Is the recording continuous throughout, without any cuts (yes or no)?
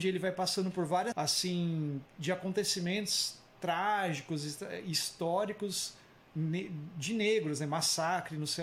no